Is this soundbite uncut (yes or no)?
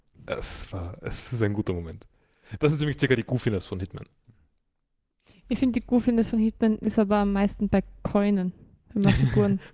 yes